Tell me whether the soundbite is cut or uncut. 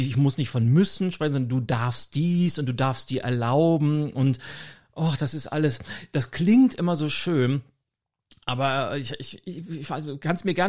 uncut